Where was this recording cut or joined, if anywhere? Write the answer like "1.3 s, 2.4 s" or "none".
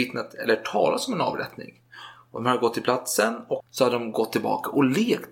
3.6 s